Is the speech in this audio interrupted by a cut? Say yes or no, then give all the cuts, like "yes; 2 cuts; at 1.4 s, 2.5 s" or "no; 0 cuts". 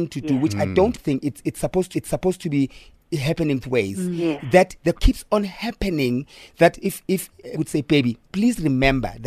yes; 7 cuts; at 1.0 s, 1.9 s, 3.6 s, 4.9 s, 6.8 s, 7.5 s, 8.2 s